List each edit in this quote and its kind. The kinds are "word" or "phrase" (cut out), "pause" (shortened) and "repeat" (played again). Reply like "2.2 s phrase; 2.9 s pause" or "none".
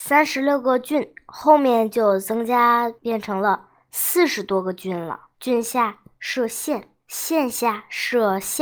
3.0 s pause; 5.3 s pause; 7.0 s pause